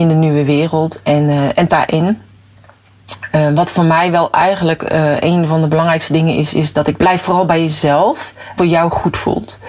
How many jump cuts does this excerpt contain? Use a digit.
3